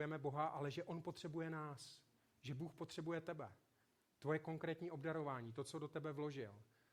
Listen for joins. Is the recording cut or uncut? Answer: uncut